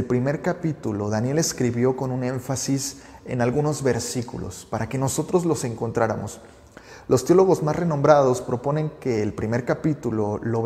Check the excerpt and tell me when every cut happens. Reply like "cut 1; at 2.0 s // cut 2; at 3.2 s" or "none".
none